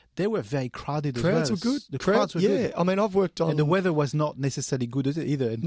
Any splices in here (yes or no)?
no